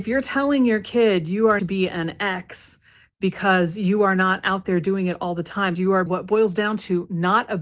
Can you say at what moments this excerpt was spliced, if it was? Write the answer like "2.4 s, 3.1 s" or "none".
1.6 s, 5.8 s, 6.1 s